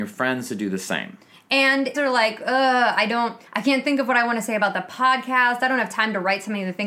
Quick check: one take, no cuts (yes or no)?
no